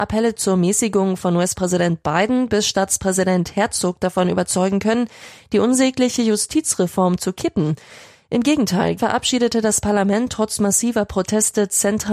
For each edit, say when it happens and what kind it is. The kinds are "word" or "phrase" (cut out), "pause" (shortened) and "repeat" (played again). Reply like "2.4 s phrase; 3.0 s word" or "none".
9.0 s word